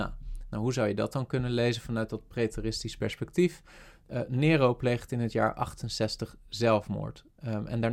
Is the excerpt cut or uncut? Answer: uncut